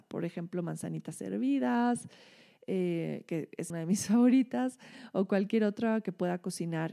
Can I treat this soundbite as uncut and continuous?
no; 1 cut; at 3.7 s

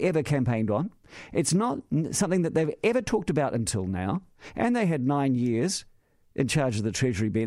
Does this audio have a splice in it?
no; 0 cuts

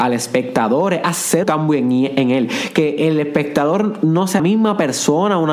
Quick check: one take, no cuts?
no; 2 cuts; at 1.4 s, 4.4 s

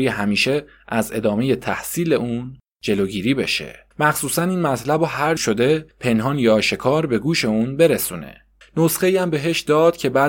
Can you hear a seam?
yes; 4 cuts; at 3.9 s, 5.4 s, 5.9 s, 8.6 s

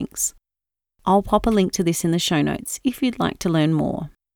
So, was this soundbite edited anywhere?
no; 0 cuts

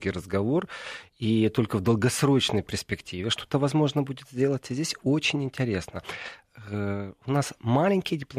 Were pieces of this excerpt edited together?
no; 0 cuts

